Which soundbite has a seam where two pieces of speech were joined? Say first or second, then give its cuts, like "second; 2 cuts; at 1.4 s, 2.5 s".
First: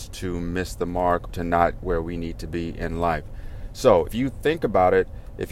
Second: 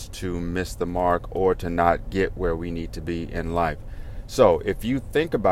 first; 3 cuts; at 1.3 s, 1.8 s, 4.1 s